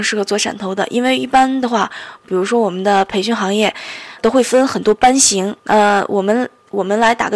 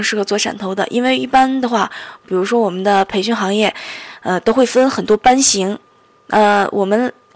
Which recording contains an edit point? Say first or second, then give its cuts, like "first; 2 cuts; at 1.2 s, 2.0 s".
first; 2 cuts; at 4.2 s, 5.6 s